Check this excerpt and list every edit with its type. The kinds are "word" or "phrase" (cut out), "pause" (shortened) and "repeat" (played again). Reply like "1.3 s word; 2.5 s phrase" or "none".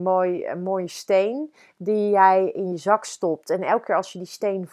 none